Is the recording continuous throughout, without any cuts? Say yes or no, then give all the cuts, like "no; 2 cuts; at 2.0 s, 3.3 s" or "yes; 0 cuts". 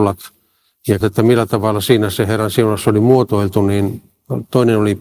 no; 1 cut; at 1.0 s